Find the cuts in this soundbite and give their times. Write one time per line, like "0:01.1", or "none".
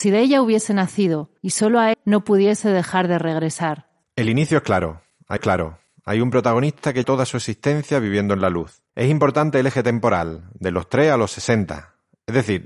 0:01.4
0:01.9
0:04.0
0:05.4
0:07.0
0:08.9